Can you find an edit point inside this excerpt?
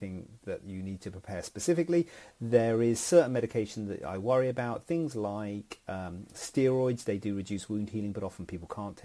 no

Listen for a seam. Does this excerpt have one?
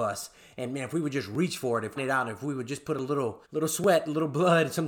yes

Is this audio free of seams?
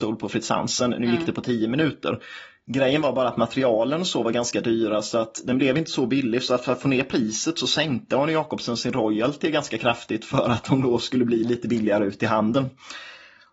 yes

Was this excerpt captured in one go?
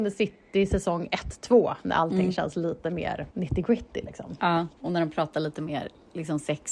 no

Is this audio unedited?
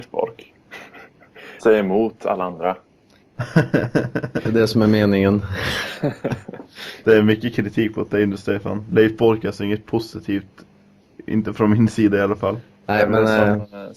no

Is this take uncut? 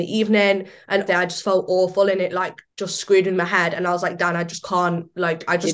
no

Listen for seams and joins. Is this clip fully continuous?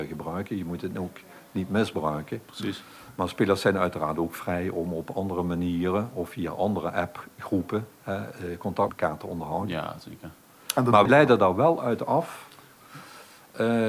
no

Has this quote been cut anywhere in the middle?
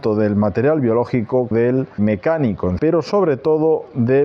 yes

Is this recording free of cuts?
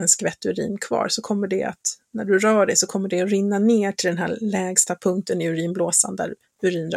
yes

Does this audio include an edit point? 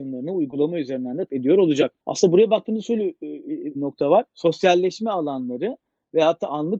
yes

